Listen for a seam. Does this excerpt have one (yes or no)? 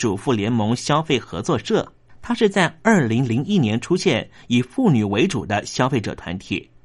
yes